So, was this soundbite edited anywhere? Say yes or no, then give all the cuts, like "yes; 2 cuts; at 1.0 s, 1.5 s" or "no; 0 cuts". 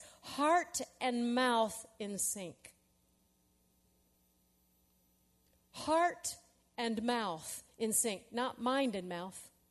no; 0 cuts